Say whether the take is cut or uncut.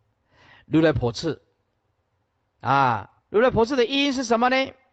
cut